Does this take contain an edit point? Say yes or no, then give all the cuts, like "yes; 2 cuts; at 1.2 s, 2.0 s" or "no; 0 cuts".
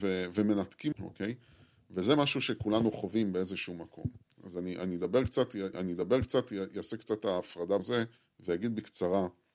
yes; 4 cuts; at 0.9 s, 5.7 s, 7.8 s, 8.2 s